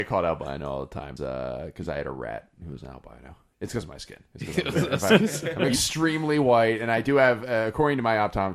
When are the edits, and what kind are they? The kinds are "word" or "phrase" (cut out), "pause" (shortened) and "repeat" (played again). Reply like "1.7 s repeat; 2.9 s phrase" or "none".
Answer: 1.2 s word; 3.5 s pause